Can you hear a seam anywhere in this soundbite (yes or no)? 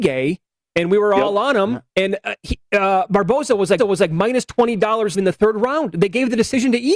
yes